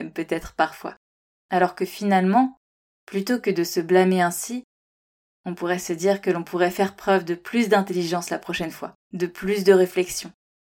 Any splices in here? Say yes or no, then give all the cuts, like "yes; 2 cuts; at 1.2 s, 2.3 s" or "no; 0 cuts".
yes; 1 cut; at 9.0 s